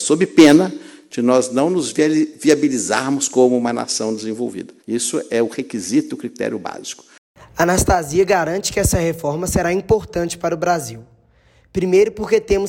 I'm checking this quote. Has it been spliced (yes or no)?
yes